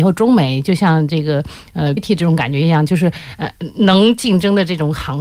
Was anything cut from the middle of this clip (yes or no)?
yes